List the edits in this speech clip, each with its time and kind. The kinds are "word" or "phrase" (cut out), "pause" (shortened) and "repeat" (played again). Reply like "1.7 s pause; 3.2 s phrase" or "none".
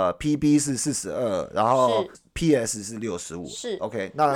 2.1 s word